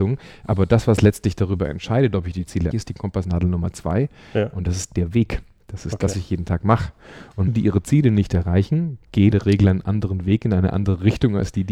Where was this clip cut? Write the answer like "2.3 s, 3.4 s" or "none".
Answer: 2.7 s, 6.1 s, 7.5 s, 9.3 s